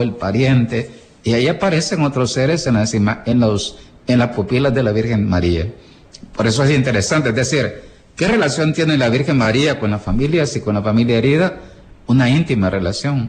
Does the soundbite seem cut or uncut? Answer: uncut